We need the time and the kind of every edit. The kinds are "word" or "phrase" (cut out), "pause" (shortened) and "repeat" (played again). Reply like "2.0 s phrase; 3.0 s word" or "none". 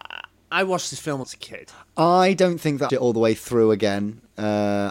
1.2 s word; 2.9 s phrase